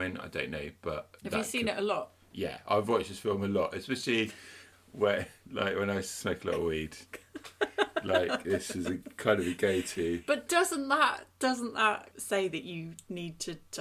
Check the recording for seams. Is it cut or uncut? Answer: cut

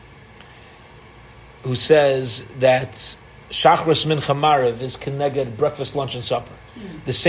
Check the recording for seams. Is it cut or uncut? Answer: uncut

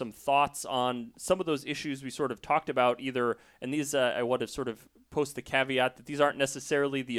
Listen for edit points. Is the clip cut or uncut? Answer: uncut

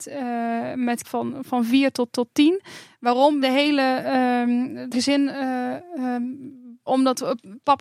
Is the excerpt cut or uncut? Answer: cut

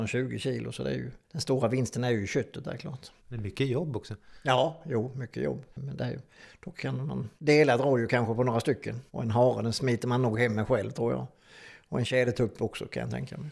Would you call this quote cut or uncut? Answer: cut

